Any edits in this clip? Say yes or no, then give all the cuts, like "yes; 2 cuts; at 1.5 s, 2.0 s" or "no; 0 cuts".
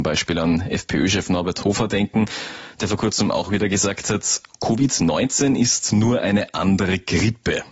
no; 0 cuts